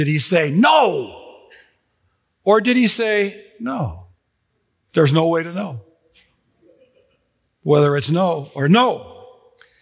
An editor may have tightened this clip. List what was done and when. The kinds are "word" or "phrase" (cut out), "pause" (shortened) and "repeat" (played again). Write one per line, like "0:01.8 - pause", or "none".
0:04.3 - pause